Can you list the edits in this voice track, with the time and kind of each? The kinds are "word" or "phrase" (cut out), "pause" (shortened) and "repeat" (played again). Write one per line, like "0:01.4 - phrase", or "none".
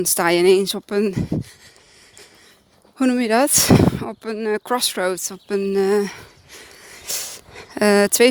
none